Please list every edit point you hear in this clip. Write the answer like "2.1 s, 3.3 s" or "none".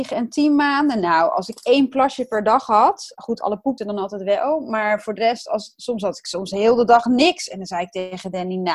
3.8 s